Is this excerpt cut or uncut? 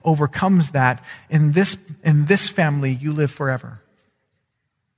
uncut